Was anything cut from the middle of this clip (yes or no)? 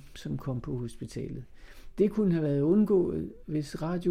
no